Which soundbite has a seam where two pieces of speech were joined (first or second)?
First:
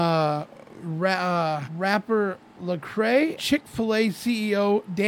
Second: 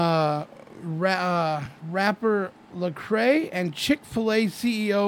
first